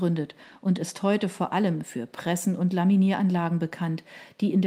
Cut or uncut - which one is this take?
uncut